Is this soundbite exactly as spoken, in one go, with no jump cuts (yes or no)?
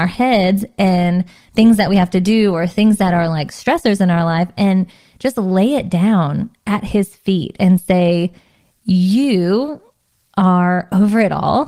yes